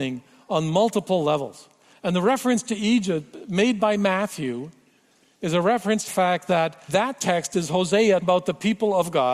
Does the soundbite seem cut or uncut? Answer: cut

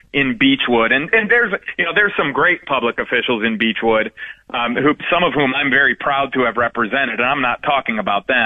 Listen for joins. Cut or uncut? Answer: uncut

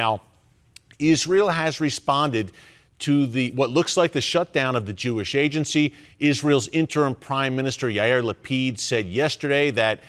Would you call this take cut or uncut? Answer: uncut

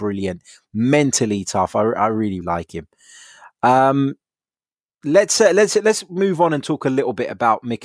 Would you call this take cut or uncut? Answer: cut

